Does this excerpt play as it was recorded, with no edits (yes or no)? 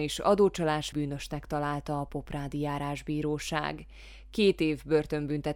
no